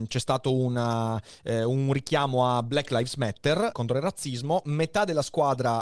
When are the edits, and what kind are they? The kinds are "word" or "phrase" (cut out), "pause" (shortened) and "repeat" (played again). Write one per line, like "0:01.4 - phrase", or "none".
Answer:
0:03.7 - word